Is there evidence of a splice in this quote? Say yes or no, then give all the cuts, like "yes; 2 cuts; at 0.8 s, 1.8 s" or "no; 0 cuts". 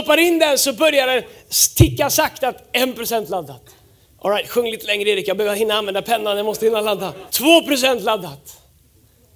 yes; 2 cuts; at 3.8 s, 7.3 s